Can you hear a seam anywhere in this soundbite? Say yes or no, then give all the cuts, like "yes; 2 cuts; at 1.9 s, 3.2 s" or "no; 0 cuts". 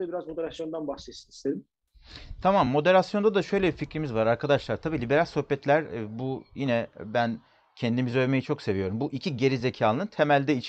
no; 0 cuts